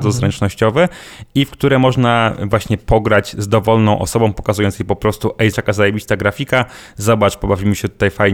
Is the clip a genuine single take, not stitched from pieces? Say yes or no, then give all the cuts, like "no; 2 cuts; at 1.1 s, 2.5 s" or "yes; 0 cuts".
no; 1 cut; at 5.5 s